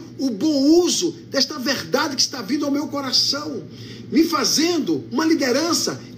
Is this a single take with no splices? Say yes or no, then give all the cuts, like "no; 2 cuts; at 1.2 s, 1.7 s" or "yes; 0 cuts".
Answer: yes; 0 cuts